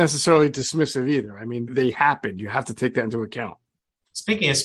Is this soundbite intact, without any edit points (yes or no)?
no